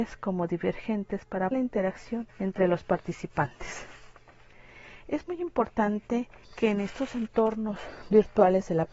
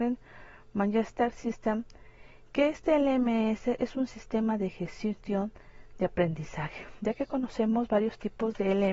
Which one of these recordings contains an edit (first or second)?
first